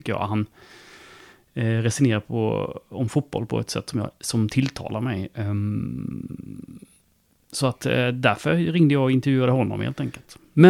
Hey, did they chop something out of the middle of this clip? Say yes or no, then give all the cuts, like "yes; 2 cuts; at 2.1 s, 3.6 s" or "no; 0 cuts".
no; 0 cuts